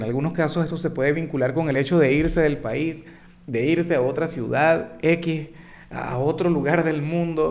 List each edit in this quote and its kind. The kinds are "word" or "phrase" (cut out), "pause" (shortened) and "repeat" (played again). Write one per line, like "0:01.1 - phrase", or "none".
none